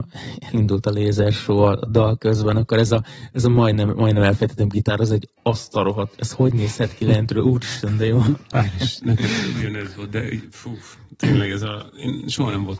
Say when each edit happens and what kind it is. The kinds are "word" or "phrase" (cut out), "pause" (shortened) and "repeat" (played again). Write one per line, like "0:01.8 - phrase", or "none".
0:05.4 - pause